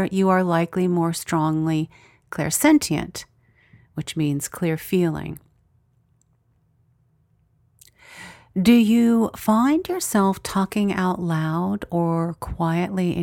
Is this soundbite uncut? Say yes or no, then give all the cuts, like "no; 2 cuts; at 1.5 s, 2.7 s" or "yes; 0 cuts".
yes; 0 cuts